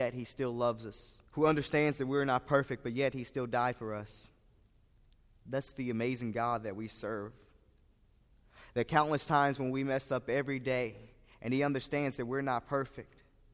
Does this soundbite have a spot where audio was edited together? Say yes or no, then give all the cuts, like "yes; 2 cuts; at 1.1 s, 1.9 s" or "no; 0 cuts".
yes; 1 cut; at 1.3 s